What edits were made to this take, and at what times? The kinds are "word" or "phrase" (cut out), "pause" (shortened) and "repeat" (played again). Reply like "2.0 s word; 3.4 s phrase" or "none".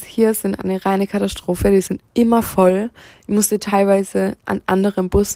none